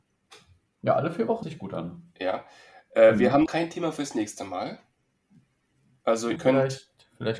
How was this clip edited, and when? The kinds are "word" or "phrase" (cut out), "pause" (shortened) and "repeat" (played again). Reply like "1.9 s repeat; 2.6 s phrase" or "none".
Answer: 1.4 s word; 3.5 s word; 6.4 s word